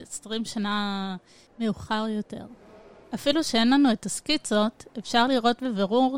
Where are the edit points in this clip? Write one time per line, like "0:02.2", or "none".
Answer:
none